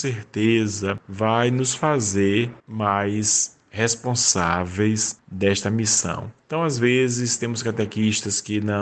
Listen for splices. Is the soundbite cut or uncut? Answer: cut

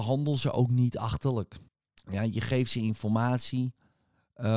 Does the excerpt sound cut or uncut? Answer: cut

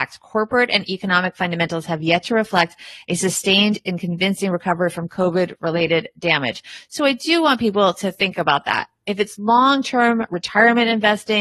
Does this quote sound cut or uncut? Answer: uncut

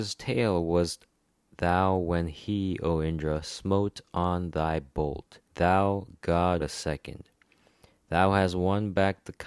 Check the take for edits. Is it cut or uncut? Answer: cut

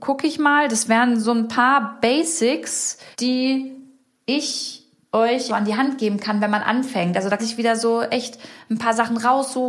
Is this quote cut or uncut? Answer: cut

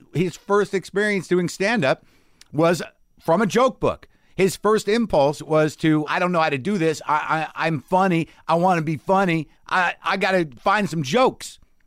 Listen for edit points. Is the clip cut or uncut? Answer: cut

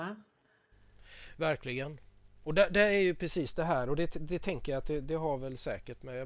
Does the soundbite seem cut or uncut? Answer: uncut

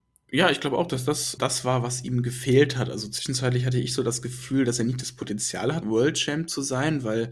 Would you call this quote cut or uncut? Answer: cut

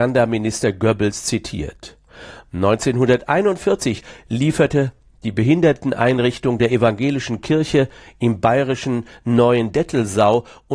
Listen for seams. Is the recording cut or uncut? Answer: uncut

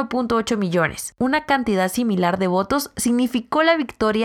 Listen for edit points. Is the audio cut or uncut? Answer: uncut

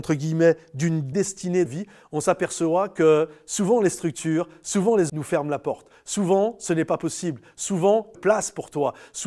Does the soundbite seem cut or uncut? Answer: cut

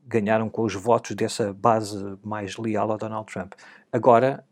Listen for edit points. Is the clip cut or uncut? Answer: uncut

